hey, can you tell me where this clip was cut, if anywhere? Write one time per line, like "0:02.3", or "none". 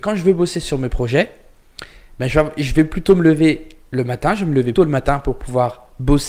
0:04.8